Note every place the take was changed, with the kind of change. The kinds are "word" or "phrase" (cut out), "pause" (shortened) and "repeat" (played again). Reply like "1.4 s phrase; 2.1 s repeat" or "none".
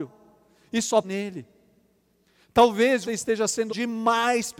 1.0 s word; 3.1 s word; 3.7 s word